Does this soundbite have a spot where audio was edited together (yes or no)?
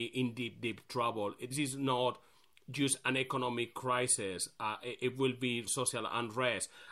yes